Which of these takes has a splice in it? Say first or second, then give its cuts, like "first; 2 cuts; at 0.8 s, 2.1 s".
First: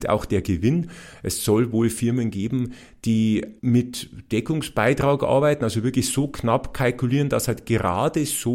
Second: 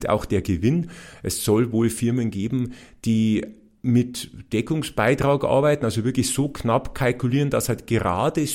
first; 1 cut; at 3.6 s